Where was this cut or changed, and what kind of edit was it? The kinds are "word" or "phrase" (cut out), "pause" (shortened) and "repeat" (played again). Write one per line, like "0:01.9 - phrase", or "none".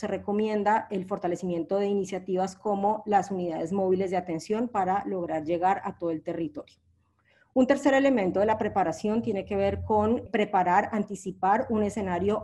none